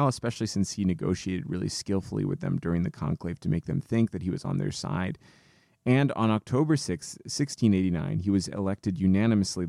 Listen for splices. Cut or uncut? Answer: uncut